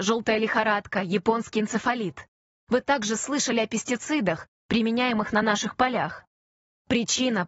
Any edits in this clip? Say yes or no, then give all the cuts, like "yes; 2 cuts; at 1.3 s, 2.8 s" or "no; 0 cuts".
no; 0 cuts